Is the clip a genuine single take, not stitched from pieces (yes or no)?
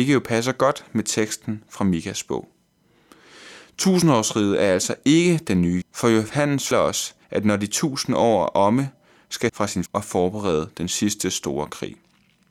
no